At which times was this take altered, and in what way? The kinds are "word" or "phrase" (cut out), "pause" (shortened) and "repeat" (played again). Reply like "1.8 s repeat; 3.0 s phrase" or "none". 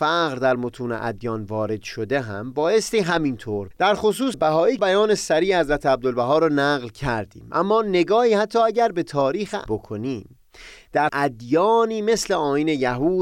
3.7 s phrase; 4.3 s word; 4.8 s phrase; 9.7 s word; 11.1 s word